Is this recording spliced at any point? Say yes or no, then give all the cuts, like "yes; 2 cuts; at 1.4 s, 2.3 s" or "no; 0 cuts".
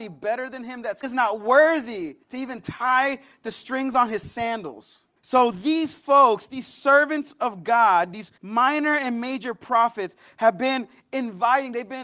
yes; 4 cuts; at 1.0 s, 2.2 s, 5.2 s, 8.4 s